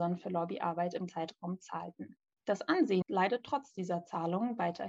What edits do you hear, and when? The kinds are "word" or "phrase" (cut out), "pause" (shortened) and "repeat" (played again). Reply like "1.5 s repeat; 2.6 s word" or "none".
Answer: 1.1 s word; 2.4 s pause; 3.0 s word